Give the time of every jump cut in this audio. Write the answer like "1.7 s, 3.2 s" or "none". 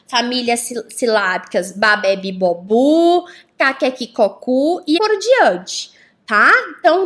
5.0 s